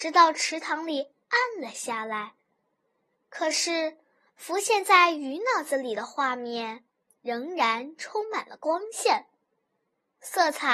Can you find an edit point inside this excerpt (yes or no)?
no